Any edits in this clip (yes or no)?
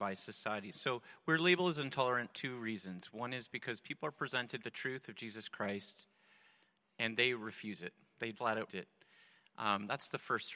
yes